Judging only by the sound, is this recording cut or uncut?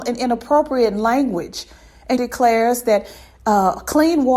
cut